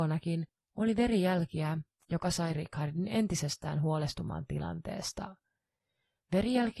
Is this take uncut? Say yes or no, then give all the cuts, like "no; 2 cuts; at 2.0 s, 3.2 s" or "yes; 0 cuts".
yes; 0 cuts